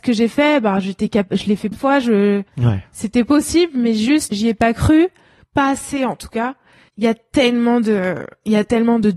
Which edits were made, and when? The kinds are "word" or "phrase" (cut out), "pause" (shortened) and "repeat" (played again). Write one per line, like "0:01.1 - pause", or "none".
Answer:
0:01.7 - word
0:02.5 - pause
0:04.3 - word
0:06.9 - word